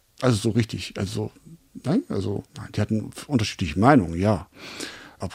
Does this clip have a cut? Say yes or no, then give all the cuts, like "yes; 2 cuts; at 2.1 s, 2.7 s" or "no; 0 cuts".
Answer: no; 0 cuts